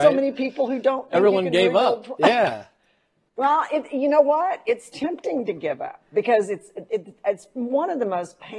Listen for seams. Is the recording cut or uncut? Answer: uncut